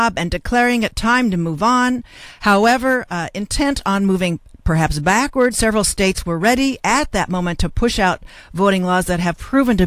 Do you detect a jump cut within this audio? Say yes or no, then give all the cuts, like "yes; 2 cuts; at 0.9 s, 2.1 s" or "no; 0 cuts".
no; 0 cuts